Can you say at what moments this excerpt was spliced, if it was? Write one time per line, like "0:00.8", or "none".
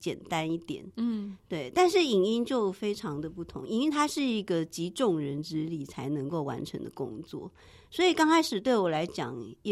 none